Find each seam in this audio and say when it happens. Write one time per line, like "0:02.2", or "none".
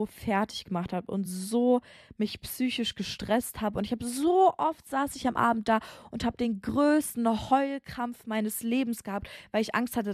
none